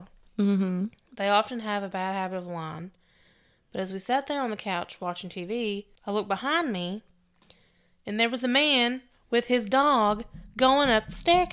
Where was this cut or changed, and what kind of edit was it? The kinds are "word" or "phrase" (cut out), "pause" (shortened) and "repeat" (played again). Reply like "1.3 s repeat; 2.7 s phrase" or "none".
5.9 s pause